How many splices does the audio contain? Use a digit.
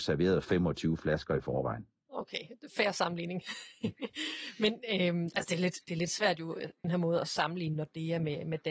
1